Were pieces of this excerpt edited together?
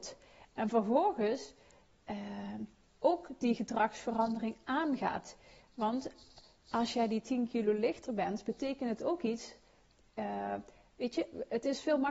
no; 0 cuts

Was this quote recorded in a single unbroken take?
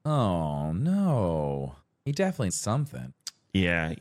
no; 2 cuts; at 1.8 s, 2.5 s

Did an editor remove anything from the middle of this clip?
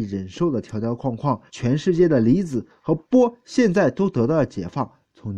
yes; 1 cut; at 1.5 s

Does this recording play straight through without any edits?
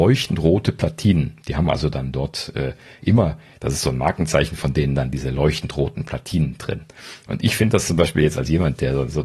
yes; 0 cuts

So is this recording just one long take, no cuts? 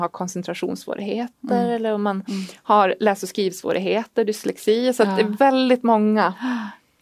yes; 0 cuts

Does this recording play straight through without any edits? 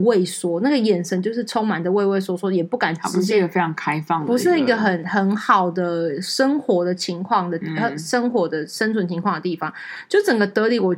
yes; 0 cuts

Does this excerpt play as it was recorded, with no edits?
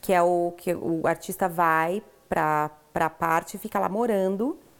yes; 0 cuts

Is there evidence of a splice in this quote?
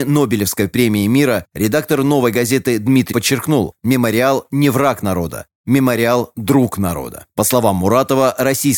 yes; 1 cut; at 3.1 s

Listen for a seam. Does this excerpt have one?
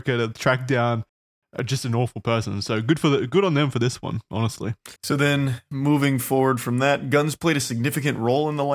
yes; 1 cut; at 5.0 s

